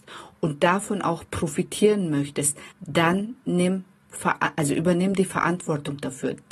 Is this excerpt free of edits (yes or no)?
no